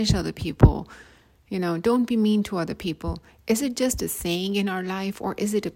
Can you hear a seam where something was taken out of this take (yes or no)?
no